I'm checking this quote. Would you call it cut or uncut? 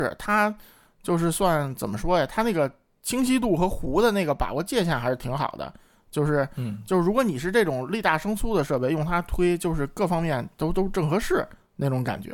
uncut